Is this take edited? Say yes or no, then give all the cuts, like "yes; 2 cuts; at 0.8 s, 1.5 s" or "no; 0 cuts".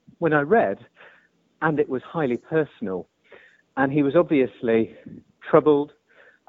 yes; 1 cut; at 5.3 s